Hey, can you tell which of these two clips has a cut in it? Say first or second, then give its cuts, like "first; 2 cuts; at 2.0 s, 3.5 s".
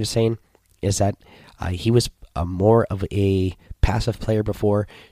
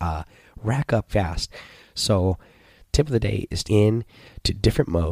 second; 2 cuts; at 1.1 s, 3.6 s